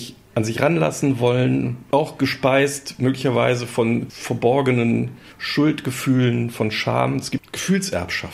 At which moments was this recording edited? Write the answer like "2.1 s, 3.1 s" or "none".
1.9 s

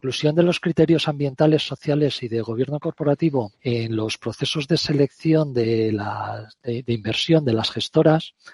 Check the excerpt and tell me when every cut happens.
3.6 s

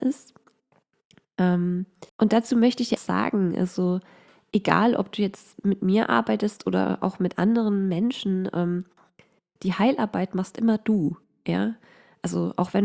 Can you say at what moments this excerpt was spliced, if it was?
2.1 s, 3.0 s

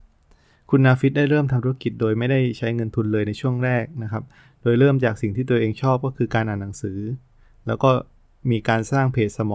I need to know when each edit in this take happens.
none

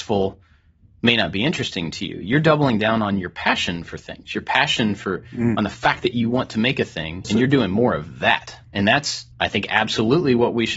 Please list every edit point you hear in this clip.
7.2 s, 8.6 s, 9.3 s

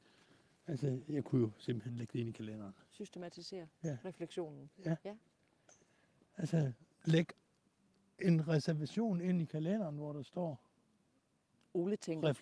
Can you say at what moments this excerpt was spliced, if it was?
3.7 s, 6.9 s

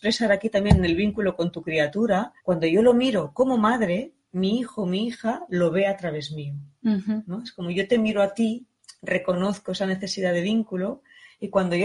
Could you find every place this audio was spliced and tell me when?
2.4 s

